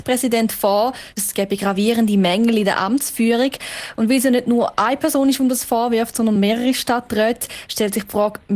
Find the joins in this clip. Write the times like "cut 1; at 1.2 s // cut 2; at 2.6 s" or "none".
none